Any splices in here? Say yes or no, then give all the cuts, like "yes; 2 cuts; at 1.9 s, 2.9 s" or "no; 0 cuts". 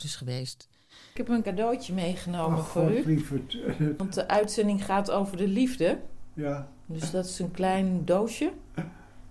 yes; 1 cut; at 1.4 s